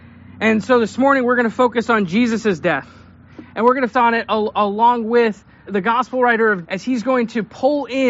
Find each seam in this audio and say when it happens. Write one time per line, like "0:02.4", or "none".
0:03.9
0:05.7
0:06.6